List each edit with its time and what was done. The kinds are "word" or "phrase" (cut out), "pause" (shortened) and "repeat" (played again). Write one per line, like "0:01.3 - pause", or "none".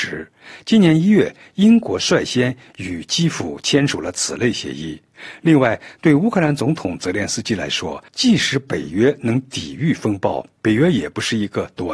0:08.1 - pause